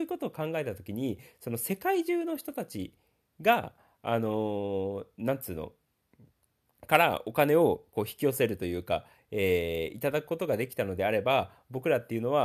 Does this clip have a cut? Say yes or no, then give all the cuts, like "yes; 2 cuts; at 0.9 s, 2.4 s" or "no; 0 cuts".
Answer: no; 0 cuts